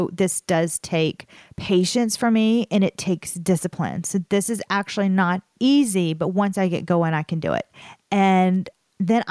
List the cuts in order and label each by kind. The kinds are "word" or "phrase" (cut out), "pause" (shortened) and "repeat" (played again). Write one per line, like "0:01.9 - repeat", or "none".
none